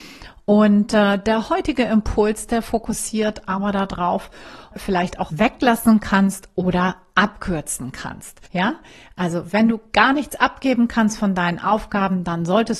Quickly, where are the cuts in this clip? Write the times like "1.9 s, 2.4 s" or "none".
4.7 s, 5.3 s, 8.5 s